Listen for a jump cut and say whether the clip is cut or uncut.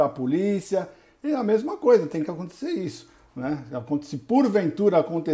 uncut